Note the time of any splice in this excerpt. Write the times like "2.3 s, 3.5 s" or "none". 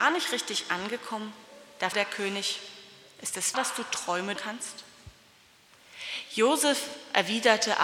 1.9 s, 3.5 s, 4.4 s